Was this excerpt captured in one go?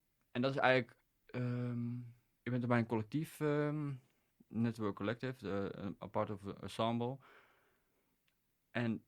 yes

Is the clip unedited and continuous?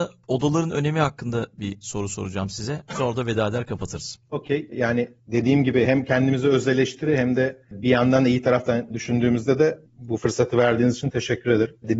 yes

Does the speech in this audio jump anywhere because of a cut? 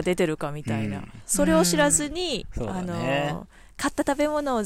no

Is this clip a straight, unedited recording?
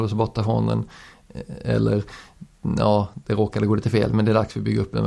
yes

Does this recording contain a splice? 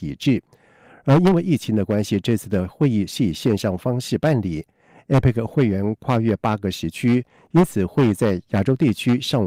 no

